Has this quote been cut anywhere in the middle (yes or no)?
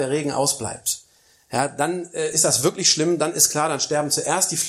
no